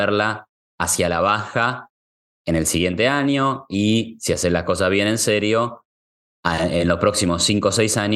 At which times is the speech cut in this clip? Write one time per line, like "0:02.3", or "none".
none